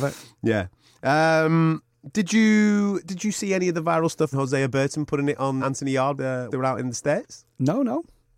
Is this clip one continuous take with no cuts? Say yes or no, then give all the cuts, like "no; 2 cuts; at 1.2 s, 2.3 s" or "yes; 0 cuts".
no; 4 cuts; at 4.3 s, 5.6 s, 6.2 s, 6.5 s